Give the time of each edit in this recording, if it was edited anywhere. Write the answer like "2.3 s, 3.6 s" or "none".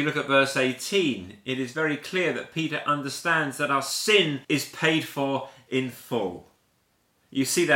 4.4 s